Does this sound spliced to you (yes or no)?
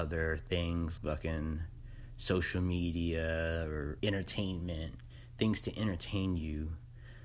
yes